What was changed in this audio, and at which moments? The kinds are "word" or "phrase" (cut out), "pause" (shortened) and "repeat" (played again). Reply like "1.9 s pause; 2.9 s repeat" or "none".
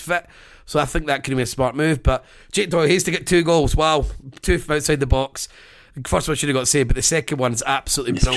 none